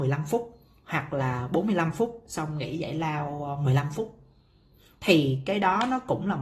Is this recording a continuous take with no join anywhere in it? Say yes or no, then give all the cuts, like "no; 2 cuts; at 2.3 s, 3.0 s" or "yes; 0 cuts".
yes; 0 cuts